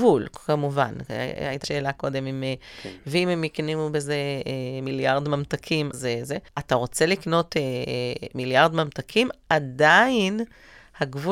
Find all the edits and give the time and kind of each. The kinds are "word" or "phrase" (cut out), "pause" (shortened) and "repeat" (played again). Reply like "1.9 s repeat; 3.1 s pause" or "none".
1.6 s word; 5.9 s word; 6.5 s pause